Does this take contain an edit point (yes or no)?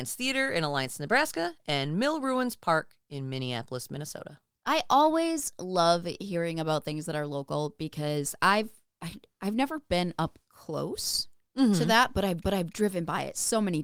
yes